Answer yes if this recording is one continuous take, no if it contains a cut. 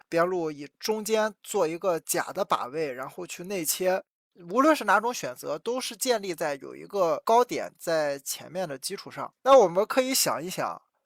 no